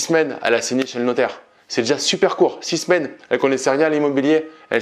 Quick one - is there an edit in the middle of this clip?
no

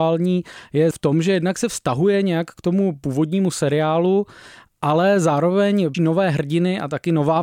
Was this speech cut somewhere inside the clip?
yes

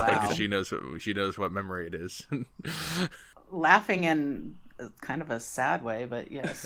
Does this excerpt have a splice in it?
no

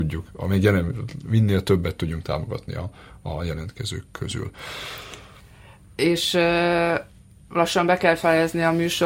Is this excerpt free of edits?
yes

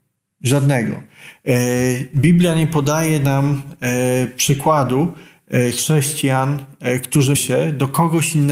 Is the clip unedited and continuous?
no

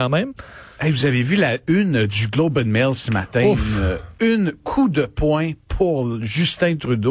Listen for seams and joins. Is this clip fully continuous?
yes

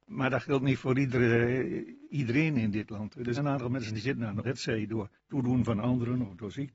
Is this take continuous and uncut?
no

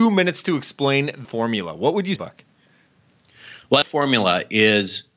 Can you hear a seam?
yes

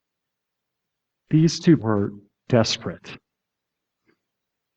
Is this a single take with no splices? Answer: no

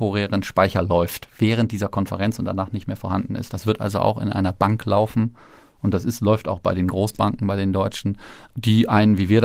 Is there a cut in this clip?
no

